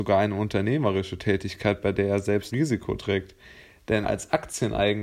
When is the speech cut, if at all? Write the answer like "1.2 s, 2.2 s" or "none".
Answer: 2.5 s, 4.0 s